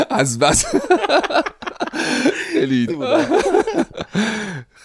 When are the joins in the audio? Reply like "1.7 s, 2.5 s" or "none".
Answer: 2.9 s